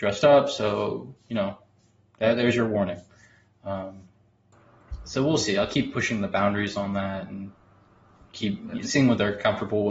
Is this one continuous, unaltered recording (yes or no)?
no